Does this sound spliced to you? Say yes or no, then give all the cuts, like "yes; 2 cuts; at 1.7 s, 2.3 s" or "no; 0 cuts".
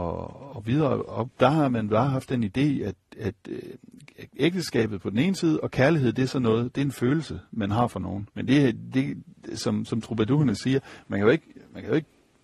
yes; 2 cuts; at 1.3 s, 8.3 s